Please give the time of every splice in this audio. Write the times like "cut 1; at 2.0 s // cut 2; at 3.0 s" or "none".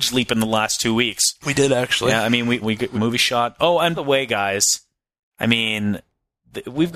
cut 1; at 2.6 s // cut 2; at 2.9 s // cut 3; at 3.9 s